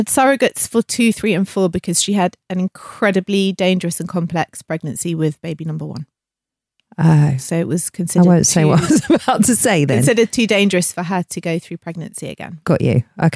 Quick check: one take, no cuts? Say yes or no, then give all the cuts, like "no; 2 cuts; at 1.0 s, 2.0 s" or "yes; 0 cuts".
yes; 0 cuts